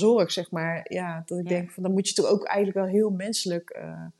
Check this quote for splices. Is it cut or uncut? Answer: uncut